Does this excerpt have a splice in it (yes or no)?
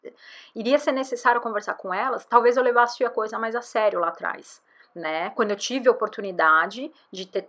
yes